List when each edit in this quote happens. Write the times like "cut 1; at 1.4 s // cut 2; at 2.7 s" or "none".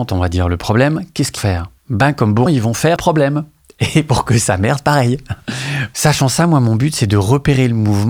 cut 1; at 1.4 s // cut 2; at 1.8 s // cut 3; at 2.5 s // cut 4; at 3.0 s